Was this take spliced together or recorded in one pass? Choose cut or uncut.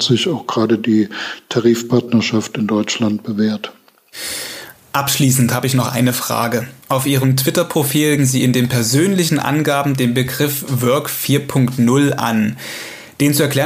cut